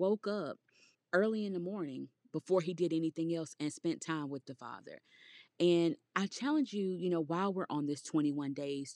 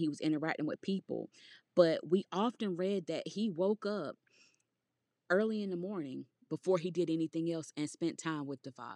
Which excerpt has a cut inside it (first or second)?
first